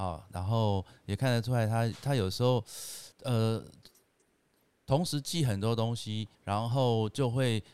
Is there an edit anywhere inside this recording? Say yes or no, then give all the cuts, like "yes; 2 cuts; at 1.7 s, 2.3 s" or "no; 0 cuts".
yes; 2 cuts; at 3.1 s, 6.3 s